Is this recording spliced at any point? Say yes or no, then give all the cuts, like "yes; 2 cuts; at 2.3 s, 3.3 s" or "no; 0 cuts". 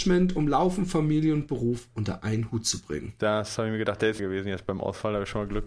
yes; 1 cut; at 4.2 s